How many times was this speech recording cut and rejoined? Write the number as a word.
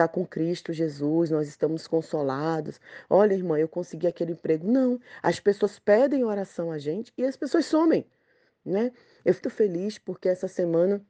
one